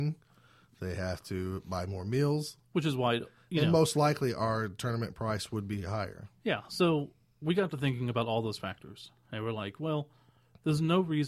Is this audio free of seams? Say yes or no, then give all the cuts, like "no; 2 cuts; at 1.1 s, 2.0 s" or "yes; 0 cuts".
yes; 0 cuts